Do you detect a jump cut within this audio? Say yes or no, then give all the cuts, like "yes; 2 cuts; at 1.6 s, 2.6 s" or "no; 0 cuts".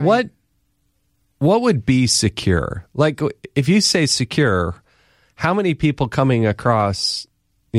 no; 0 cuts